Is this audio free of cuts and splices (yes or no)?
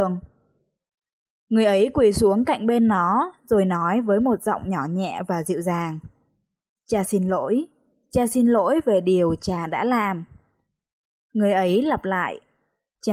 yes